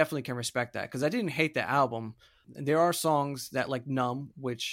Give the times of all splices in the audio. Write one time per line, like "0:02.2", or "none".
none